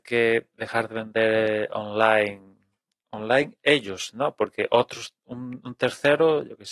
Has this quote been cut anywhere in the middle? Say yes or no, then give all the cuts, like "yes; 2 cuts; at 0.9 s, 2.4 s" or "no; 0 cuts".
no; 0 cuts